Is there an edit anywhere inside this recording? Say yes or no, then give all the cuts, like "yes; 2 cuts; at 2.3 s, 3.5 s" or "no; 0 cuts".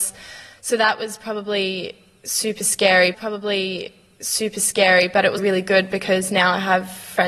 yes; 2 cuts; at 3.1 s, 5.4 s